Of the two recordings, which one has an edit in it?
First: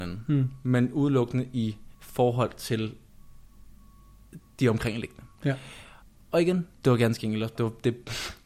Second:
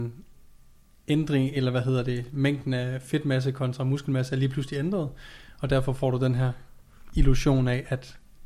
first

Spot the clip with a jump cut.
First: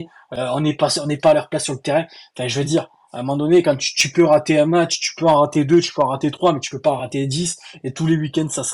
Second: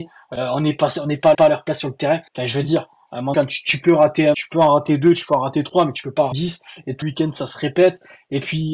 second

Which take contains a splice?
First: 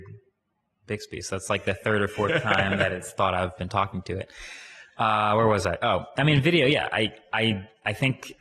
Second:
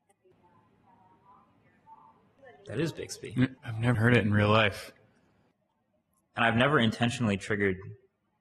second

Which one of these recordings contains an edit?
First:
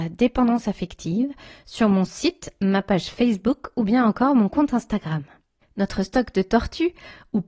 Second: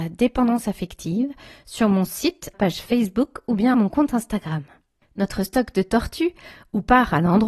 second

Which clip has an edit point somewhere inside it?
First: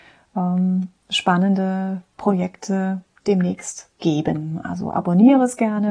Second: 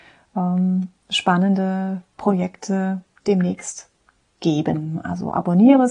first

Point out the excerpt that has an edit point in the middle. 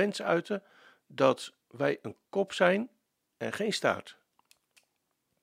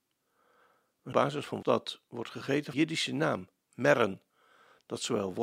second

